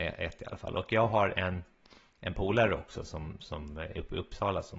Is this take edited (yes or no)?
no